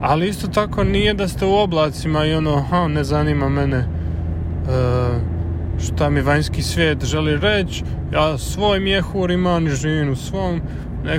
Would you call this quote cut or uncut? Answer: uncut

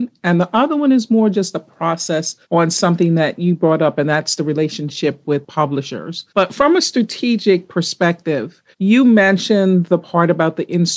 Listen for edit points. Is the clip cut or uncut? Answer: cut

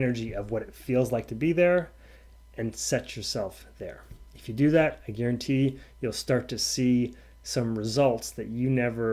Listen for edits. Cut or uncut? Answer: cut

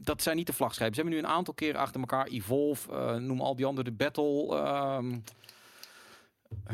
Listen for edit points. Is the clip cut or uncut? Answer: uncut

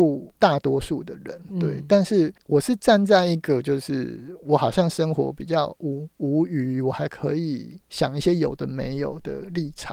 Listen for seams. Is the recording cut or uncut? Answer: cut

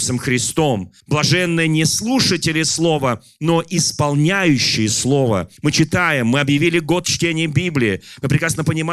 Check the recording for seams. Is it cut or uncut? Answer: cut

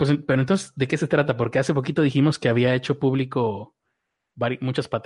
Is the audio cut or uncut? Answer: uncut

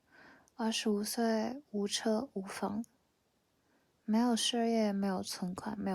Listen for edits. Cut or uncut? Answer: uncut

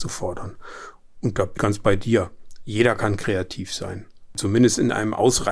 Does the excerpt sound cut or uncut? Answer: cut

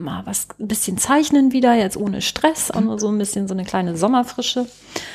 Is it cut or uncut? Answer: cut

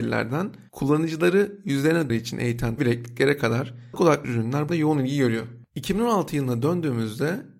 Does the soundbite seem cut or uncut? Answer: cut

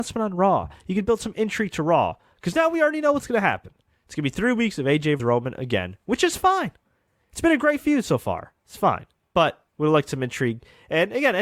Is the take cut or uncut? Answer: cut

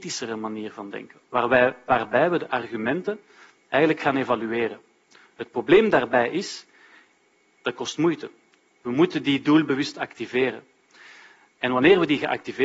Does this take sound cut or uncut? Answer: uncut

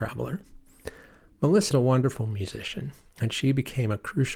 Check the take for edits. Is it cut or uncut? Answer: cut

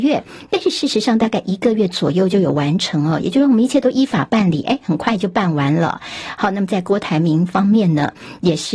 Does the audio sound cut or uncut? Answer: uncut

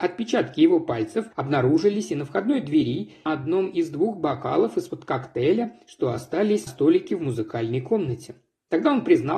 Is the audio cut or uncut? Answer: cut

